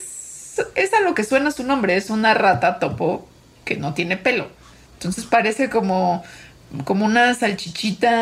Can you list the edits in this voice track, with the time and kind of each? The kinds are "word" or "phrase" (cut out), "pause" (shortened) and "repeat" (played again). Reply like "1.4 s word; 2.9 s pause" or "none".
none

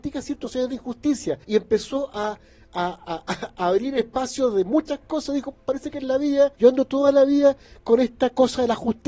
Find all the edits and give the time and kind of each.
1.4 s pause; 6.5 s pause

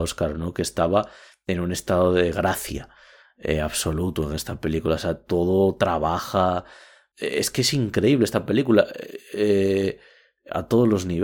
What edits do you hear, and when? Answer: none

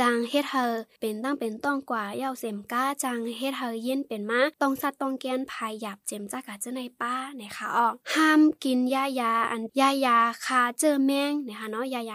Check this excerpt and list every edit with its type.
8.0 s pause

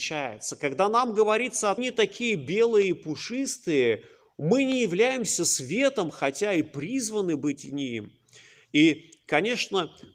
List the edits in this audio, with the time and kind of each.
1.8 s phrase

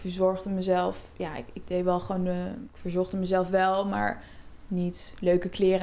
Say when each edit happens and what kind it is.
none

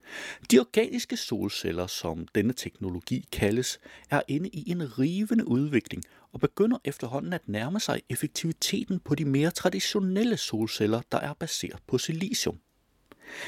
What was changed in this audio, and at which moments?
none

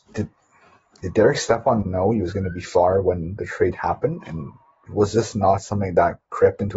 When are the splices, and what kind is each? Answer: 1.8 s word; 4.9 s word

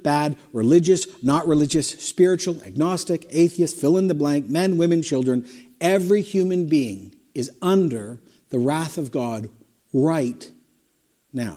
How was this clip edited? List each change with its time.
none

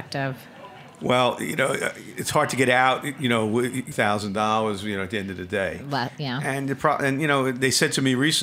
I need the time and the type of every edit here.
3.9 s phrase

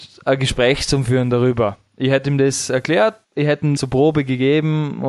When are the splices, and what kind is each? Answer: 3.2 s pause; 3.8 s word

